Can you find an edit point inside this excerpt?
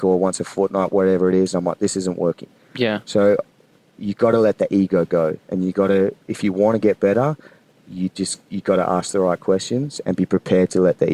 no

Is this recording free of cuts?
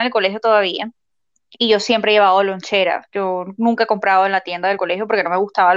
yes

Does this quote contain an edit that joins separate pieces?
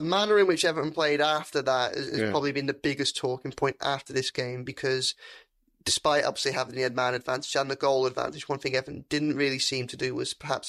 no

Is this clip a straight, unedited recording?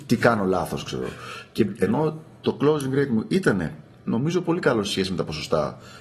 yes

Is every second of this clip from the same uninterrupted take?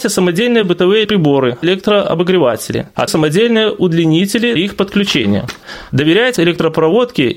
no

